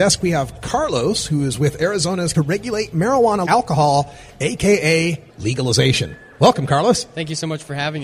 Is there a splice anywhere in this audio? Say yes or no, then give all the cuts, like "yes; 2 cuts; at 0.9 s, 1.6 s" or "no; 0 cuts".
yes; 3 cuts; at 2.3 s, 3.5 s, 5.3 s